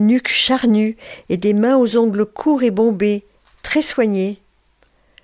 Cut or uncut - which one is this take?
uncut